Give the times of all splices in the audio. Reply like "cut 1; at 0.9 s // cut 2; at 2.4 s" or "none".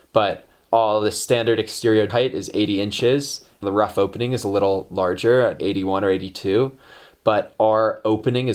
cut 1; at 2.1 s // cut 2; at 3.6 s // cut 3; at 5.6 s